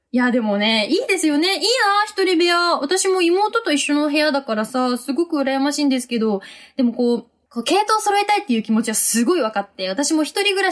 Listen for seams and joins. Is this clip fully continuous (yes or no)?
yes